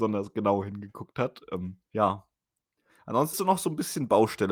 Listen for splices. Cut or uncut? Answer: cut